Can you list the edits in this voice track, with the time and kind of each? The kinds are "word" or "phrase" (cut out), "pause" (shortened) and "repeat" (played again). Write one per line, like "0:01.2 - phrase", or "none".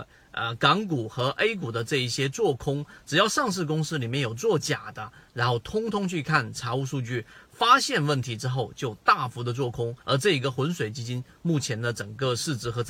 0:10.0 - pause

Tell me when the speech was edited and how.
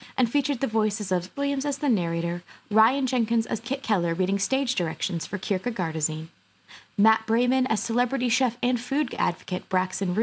0:01.4 - word
0:03.6 - phrase

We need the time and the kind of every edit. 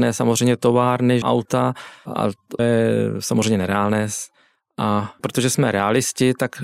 0:01.2 - word
0:02.1 - word
0:02.6 - word
0:05.2 - word

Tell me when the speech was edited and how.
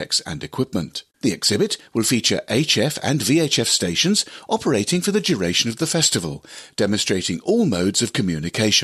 0:01.1 - pause

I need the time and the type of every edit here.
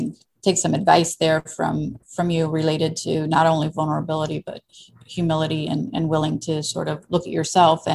none

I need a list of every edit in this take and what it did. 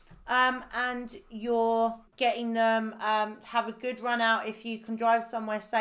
0:02.1 - pause

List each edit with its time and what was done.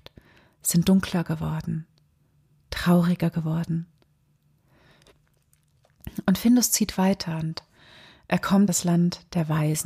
0:08.7 - word

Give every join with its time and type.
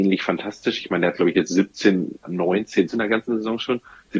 0:02.2 - word
0:02.9 - word

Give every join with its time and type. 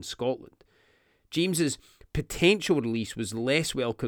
none

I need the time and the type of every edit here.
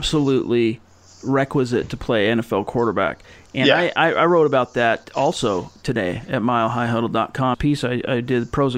0:07.5 - phrase

